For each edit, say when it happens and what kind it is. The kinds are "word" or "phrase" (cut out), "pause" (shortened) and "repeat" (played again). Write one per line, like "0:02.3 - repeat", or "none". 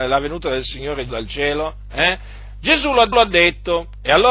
0:01.1 - word
0:03.1 - repeat

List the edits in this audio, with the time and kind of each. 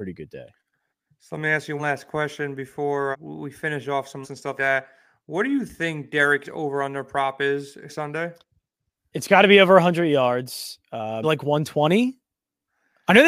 0:01.8 - word
0:03.1 - word
0:04.2 - word
0:04.6 - word
0:06.4 - word
0:07.9 - word
0:11.2 - word

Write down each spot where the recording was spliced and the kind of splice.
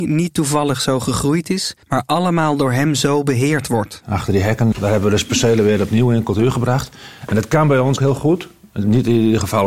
0:01.8 - pause
0:04.7 - word
0:08.0 - word

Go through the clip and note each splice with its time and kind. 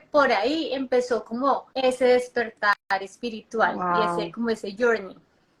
0:01.7 - pause

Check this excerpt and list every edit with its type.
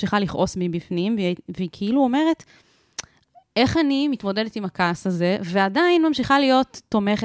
none

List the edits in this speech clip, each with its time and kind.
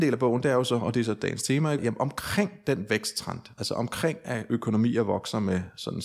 0:01.8 - phrase

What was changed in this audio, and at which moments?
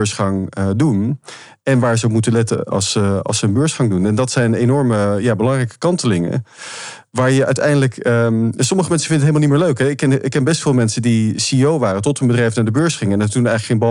none

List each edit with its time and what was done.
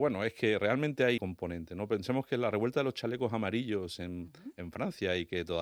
0:01.2 - word

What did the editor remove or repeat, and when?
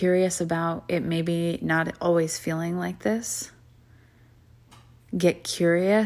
none

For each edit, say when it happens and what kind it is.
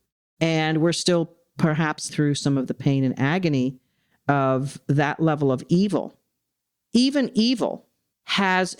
0:02.1 - word

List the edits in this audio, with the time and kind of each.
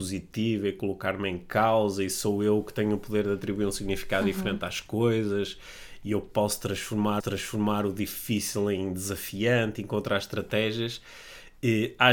0:07.2 - repeat

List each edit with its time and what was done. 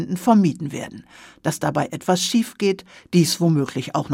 none

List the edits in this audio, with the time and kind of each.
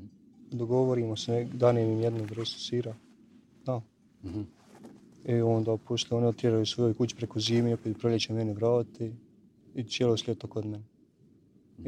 none

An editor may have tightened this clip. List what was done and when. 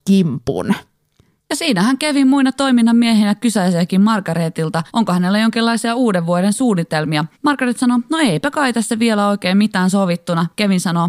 0:04.9 - pause
0:07.3 - pause

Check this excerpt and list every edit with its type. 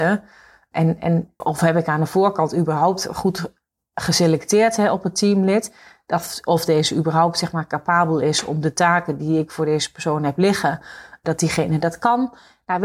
0:01.4 - word

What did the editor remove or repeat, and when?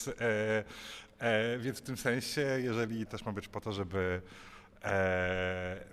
0:03.1 - word

